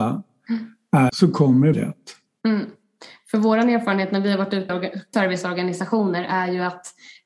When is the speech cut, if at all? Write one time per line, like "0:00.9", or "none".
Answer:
0:01.1
0:01.7
0:04.7
0:05.1